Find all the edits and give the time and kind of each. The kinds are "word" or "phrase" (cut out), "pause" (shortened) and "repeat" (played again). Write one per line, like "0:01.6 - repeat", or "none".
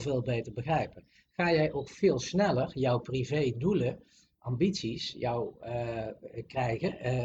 none